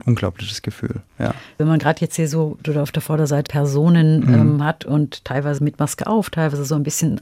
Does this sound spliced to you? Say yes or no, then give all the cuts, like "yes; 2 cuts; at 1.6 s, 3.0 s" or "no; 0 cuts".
yes; 4 cuts; at 1.6 s, 2.6 s, 3.5 s, 5.6 s